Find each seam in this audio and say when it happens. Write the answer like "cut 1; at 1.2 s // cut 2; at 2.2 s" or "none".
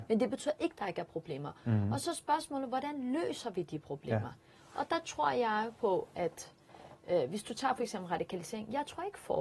none